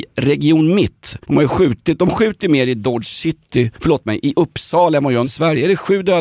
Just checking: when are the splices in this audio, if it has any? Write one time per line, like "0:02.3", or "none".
0:01.2
0:03.8
0:05.2